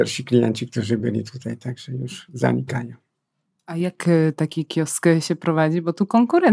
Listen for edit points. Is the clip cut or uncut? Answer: uncut